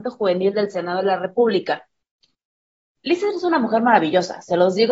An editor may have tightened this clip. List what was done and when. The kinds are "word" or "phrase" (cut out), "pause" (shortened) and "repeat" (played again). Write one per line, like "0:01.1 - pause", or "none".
none